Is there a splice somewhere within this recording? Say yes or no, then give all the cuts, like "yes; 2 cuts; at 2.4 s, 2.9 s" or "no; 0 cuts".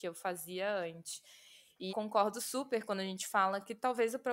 yes; 1 cut; at 1.9 s